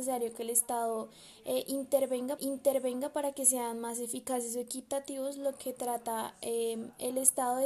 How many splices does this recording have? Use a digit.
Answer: 1